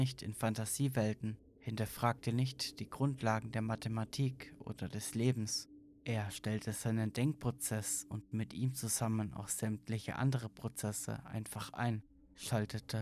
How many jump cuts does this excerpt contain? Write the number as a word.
zero